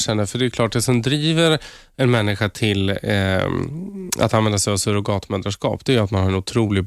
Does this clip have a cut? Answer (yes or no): no